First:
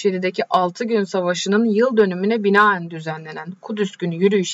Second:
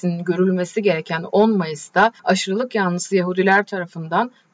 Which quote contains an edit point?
second; 1 cut; at 2.2 s

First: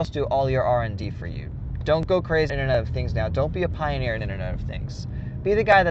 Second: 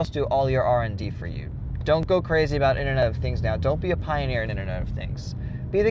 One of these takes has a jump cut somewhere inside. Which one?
first; 1 cut; at 2.5 s

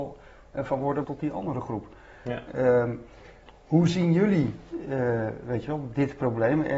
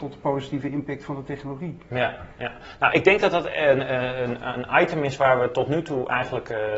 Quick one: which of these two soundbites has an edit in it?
first; 1 cut; at 1.0 s

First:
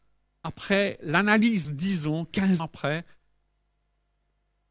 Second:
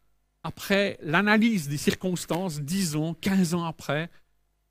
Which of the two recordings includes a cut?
first; 2 cuts; at 1.6 s, 2.6 s

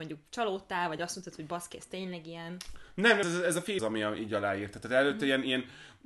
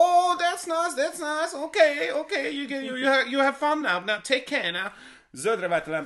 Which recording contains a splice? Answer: first; 2 cuts; at 3.2 s, 3.8 s

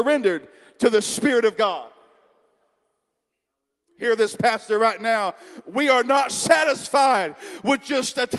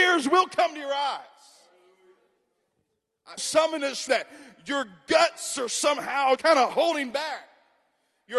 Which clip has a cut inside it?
second; 3 cuts; at 3.4 s, 4.1 s, 6.4 s

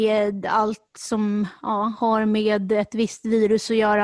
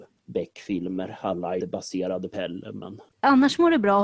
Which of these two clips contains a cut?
second; 2 cuts; at 1.6 s, 2.3 s

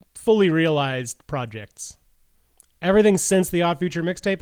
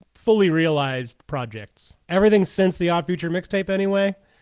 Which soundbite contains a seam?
second; 1 cut; at 2.0 s

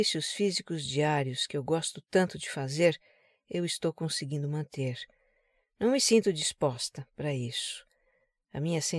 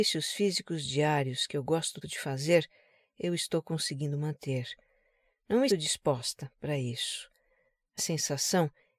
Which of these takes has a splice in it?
second; 3 cuts; at 2.0 s, 5.7 s, 8.0 s

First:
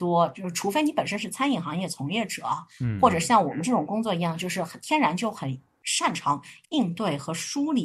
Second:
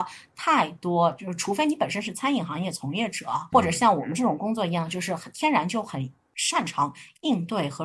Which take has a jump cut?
second; 1 cut; at 3.5 s

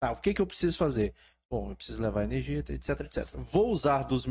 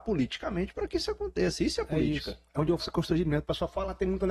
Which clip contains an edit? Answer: second; 1 cut; at 2.8 s

